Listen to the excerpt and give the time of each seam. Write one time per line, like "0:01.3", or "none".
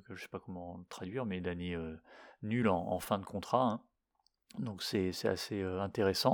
none